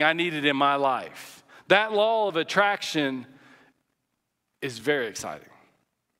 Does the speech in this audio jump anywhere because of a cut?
no; 0 cuts

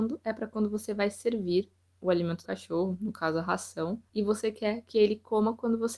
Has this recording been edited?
yes; 2 cuts; at 2.4 s, 4.1 s

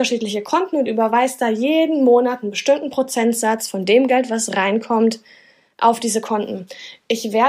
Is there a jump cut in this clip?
no; 0 cuts

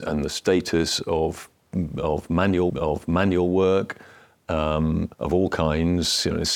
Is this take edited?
yes; 2 cuts; at 2.7 s, 5.1 s

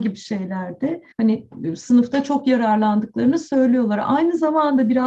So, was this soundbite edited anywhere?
yes; 1 cut; at 1.1 s

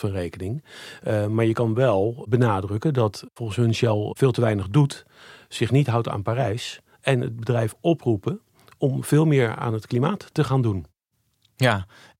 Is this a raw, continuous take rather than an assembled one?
yes; 0 cuts

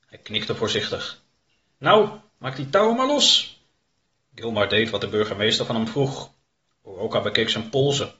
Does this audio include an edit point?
no; 0 cuts

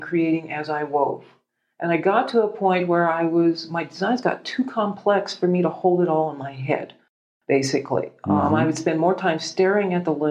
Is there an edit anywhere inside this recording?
no; 0 cuts

